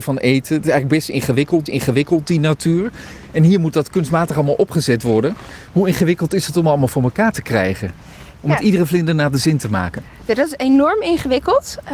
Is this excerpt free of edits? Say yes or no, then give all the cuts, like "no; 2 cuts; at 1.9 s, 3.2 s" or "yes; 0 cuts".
no; 1 cut; at 1.7 s